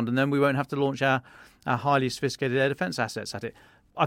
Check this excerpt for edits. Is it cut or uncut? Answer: uncut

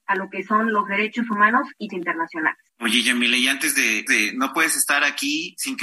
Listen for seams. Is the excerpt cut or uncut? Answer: cut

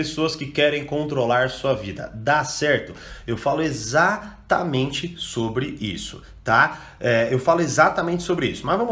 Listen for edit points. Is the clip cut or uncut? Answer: uncut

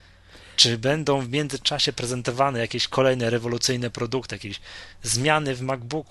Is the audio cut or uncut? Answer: uncut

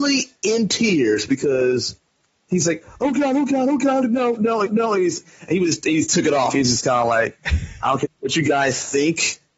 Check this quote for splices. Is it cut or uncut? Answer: cut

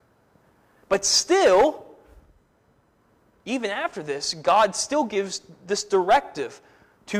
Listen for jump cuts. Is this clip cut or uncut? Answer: uncut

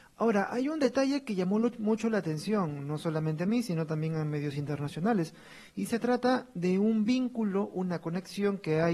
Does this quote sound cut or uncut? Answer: uncut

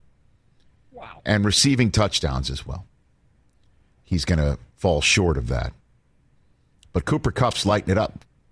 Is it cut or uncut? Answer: uncut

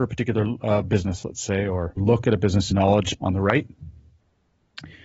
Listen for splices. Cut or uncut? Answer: cut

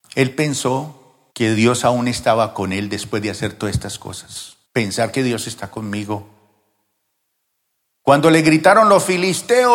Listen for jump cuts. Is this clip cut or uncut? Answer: cut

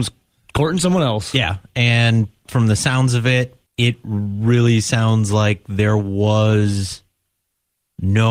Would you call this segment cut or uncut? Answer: cut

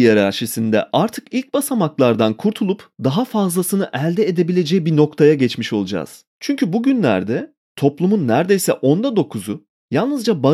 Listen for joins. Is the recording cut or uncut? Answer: cut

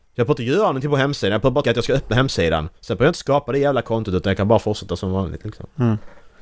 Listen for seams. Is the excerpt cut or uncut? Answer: cut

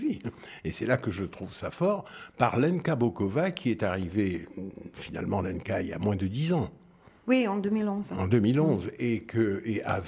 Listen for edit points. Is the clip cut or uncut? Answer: uncut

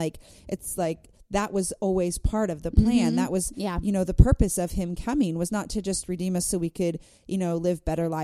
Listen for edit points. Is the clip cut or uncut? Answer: uncut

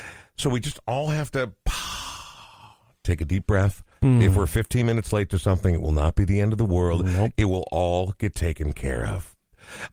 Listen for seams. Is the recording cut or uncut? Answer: uncut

